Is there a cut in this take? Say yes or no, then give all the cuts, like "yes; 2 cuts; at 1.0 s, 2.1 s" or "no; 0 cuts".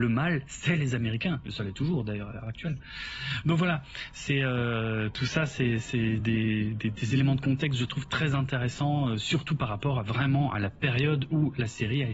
no; 0 cuts